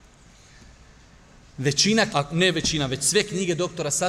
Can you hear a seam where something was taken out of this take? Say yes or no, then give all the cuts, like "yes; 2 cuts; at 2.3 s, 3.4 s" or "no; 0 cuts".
yes; 1 cut; at 2.1 s